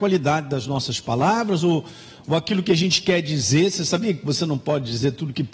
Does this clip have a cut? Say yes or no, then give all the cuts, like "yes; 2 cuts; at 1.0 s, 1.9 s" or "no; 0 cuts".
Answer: no; 0 cuts